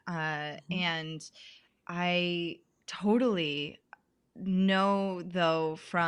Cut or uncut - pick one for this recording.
uncut